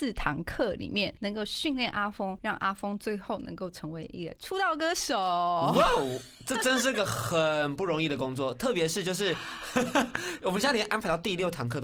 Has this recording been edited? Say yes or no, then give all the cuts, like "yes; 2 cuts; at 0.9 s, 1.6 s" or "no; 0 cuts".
no; 0 cuts